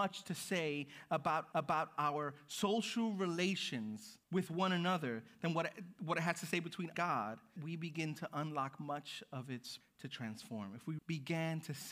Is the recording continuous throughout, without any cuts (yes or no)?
no